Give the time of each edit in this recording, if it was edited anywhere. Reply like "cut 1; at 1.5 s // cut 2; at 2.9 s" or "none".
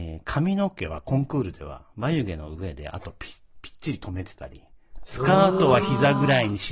none